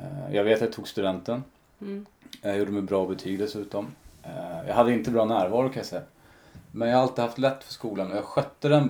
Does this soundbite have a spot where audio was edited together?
no; 0 cuts

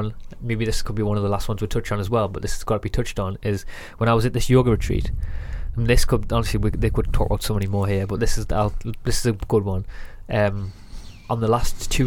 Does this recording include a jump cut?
no; 0 cuts

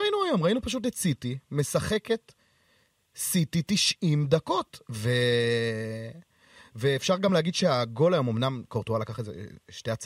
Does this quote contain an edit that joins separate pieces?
no; 0 cuts

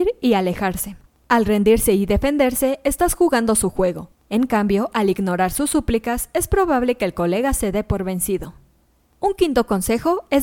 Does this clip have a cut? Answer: no; 0 cuts

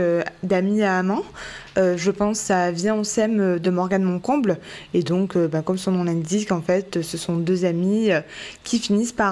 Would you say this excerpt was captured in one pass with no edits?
yes; 0 cuts

